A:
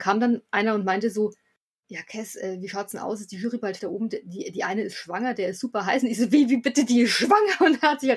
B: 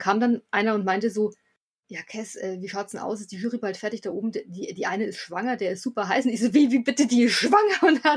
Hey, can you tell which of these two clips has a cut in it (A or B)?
A